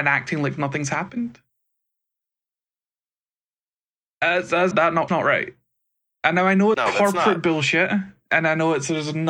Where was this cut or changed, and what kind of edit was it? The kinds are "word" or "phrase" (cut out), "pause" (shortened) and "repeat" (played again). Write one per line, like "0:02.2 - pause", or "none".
0:04.7 - word
0:05.1 - word
0:06.7 - word